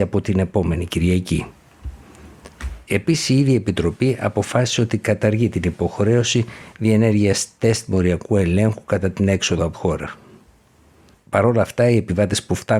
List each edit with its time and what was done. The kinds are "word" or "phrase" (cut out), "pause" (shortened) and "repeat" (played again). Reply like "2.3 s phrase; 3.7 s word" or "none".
9.7 s word